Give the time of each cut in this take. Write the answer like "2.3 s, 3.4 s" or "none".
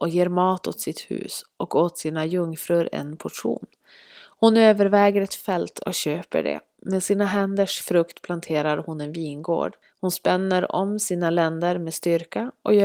9.8 s